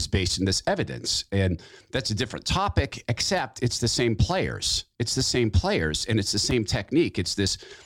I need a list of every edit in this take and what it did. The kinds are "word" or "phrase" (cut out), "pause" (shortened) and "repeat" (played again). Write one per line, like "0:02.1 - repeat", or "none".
none